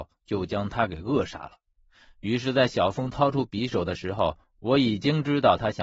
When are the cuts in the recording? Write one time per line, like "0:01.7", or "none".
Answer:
none